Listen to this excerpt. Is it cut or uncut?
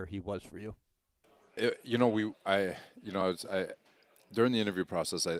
uncut